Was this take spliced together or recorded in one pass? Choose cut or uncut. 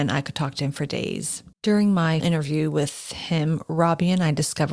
cut